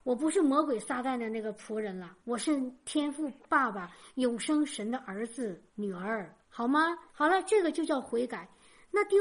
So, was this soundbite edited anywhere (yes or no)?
yes